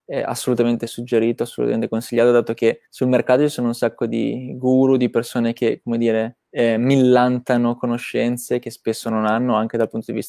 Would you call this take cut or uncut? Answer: cut